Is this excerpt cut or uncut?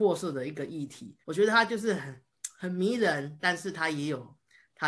cut